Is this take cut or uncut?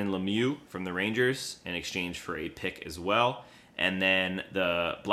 uncut